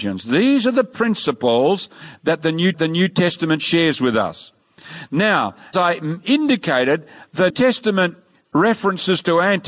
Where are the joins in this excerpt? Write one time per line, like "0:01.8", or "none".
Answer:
0:02.7
0:05.7
0:07.5